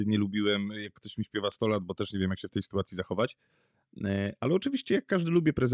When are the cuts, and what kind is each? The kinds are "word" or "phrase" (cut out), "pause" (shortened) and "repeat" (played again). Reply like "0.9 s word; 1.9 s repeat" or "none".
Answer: none